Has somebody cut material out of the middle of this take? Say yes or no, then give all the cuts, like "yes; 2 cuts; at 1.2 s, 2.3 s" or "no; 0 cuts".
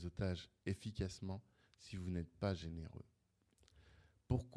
no; 0 cuts